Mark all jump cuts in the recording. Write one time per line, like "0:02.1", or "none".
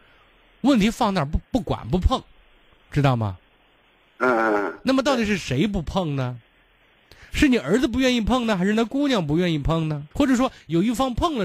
0:10.1